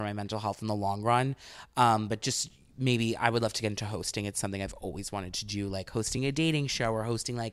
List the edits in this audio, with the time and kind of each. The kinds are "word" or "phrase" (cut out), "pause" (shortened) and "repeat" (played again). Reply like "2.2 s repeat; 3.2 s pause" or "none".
none